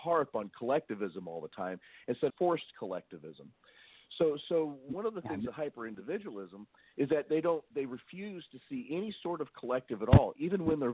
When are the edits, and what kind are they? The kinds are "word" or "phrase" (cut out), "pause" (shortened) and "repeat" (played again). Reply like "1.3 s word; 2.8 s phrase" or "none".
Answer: 2.3 s phrase